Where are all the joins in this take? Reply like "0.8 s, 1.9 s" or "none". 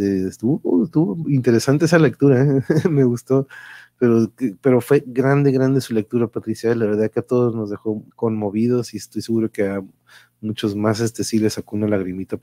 8.1 s